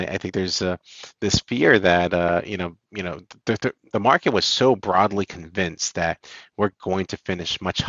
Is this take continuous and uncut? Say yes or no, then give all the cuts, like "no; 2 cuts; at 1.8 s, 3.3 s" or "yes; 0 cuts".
yes; 0 cuts